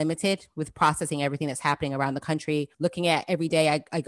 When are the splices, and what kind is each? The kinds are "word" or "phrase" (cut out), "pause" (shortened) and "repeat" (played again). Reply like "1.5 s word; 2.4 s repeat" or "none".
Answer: 2.7 s pause